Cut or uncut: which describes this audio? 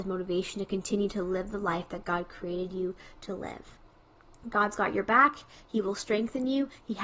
uncut